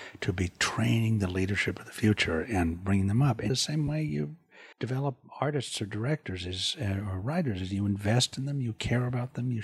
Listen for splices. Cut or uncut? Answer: cut